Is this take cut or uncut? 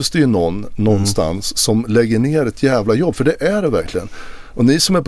uncut